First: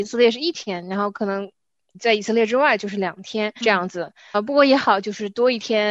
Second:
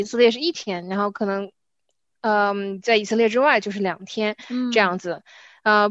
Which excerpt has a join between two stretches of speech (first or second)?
first